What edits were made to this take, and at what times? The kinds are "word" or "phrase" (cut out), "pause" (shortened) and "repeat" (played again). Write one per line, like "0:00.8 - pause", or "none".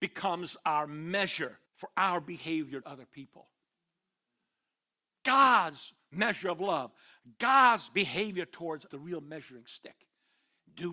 0:01.7 - pause
0:02.8 - word
0:08.9 - phrase